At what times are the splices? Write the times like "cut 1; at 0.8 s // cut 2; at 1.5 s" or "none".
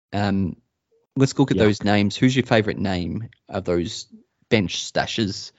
none

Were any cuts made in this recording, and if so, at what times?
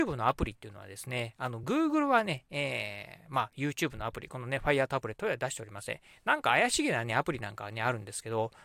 none

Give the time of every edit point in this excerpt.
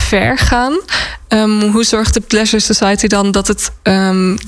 none

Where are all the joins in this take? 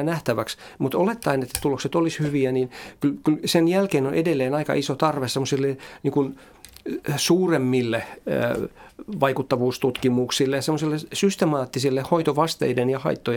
none

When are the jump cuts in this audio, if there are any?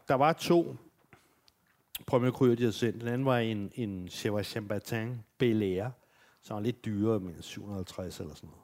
none

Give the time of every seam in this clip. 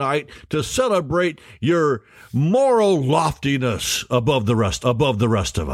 cut 1; at 4.8 s

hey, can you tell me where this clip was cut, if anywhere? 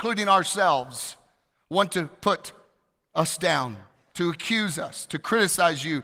none

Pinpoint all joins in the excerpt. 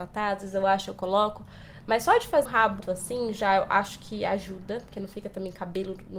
cut 1; at 2.4 s // cut 2; at 2.8 s

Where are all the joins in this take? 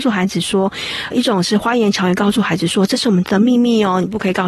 cut 1; at 1.1 s

